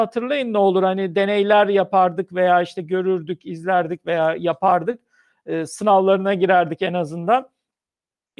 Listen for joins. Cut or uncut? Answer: uncut